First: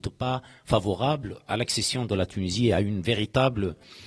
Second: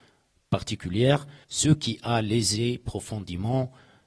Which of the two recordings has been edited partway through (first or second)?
second